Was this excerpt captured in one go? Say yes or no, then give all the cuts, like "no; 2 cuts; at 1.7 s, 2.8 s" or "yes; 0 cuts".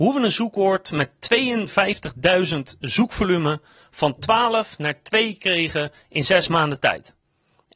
yes; 0 cuts